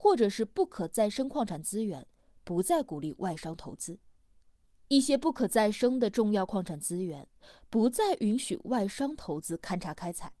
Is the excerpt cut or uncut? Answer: uncut